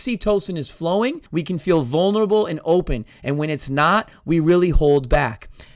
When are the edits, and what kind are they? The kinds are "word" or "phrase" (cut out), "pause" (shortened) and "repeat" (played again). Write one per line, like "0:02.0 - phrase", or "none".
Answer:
0:01.3 - pause